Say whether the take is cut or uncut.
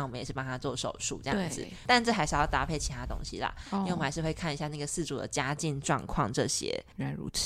uncut